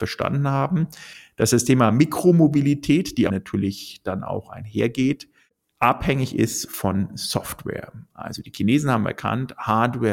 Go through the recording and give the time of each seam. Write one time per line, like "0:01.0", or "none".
0:03.3